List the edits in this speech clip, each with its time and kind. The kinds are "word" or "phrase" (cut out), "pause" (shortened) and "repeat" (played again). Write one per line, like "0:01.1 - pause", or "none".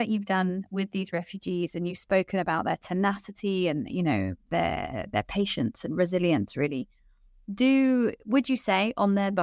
none